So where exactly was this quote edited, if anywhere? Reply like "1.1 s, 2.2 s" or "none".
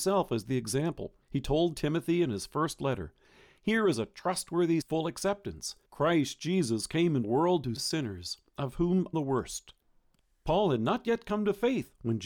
1.2 s, 4.8 s, 5.9 s, 7.2 s, 7.8 s, 9.1 s